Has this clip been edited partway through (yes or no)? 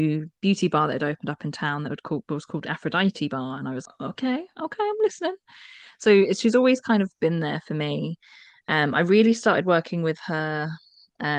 yes